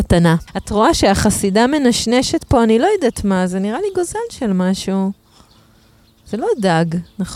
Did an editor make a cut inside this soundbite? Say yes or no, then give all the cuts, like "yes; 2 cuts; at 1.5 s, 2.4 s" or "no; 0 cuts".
no; 0 cuts